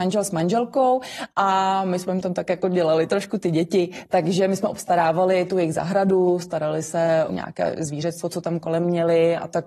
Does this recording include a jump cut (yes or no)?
yes